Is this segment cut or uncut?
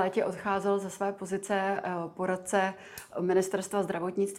uncut